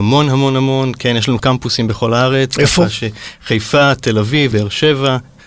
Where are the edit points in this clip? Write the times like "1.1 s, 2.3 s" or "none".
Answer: 1.4 s, 4.5 s